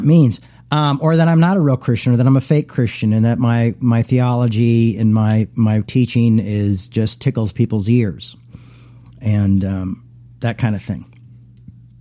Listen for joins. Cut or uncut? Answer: uncut